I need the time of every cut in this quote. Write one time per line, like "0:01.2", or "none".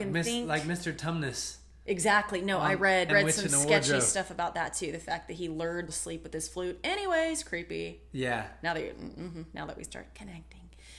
0:03.1
0:05.9